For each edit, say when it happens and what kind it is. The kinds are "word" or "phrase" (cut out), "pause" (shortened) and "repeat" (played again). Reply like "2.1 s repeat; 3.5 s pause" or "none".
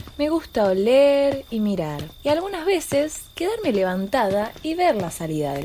2.1 s pause